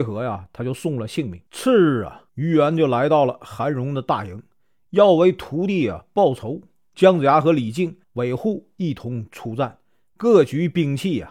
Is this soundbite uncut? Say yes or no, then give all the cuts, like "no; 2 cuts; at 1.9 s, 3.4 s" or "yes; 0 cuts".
no; 3 cuts; at 1.5 s, 2.3 s, 8.0 s